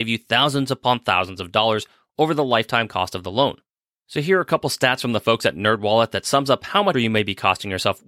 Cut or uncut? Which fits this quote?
cut